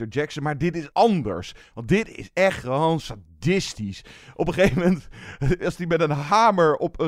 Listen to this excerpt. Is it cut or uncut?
uncut